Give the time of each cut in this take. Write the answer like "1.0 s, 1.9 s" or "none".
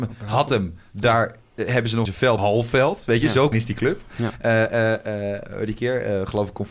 2.0 s, 2.4 s, 3.5 s